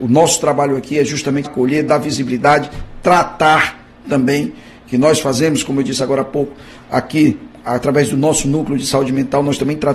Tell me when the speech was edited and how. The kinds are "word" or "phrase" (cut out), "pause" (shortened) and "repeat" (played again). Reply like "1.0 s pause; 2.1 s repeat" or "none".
1.4 s word